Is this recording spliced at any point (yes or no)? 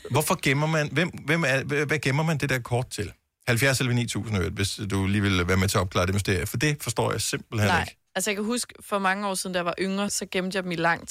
yes